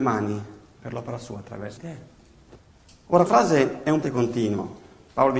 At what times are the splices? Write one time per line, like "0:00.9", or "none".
0:01.8
0:03.3
0:04.0